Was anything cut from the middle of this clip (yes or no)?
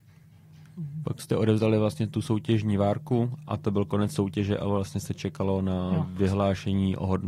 no